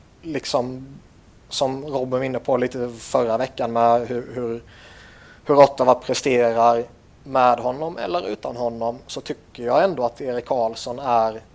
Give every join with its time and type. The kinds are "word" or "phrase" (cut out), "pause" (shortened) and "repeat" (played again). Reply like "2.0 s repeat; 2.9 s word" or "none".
none